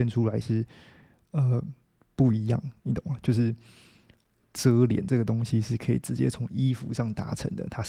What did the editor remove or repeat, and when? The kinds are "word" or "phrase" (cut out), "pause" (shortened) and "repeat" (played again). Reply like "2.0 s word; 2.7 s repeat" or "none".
2.0 s pause; 2.8 s pause